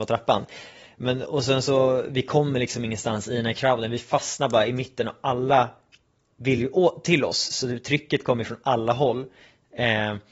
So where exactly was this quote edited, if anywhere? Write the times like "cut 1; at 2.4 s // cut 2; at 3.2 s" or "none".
none